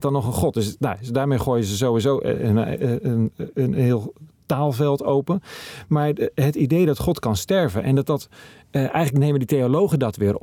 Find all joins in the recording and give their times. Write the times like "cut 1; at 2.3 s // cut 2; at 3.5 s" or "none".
none